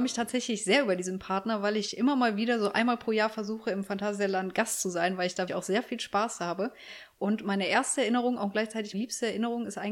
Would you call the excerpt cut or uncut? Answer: cut